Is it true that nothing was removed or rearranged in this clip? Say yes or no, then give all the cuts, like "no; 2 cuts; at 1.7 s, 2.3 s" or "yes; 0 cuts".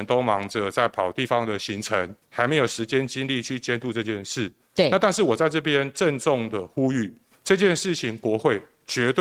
no; 2 cuts; at 2.2 s, 7.3 s